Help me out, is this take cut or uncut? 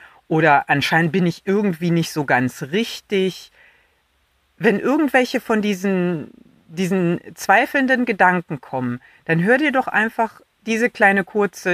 uncut